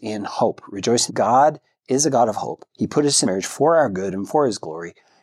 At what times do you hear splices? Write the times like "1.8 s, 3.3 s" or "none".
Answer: 1.1 s, 2.7 s, 3.2 s